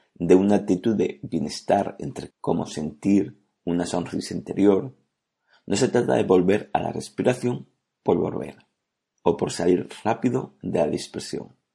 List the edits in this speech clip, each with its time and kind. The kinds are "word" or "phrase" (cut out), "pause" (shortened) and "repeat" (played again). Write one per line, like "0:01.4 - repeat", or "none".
0:02.3 - word